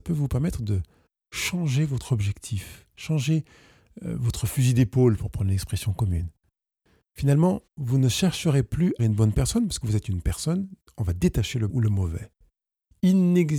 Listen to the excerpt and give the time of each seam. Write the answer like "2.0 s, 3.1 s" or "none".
7.7 s, 9.0 s, 9.8 s, 11.7 s